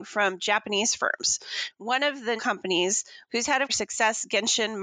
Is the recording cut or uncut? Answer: cut